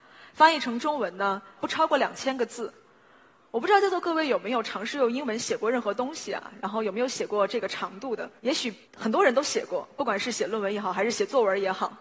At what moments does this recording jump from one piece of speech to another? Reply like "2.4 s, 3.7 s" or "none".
1.6 s, 8.4 s, 8.8 s